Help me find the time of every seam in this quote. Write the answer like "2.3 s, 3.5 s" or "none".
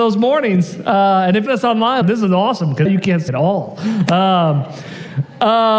1.5 s, 2.0 s, 2.9 s, 3.3 s